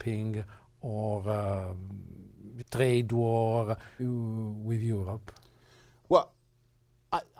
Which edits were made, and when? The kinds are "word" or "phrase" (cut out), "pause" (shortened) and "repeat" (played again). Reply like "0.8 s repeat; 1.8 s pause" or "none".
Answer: 2.6 s word; 4.0 s word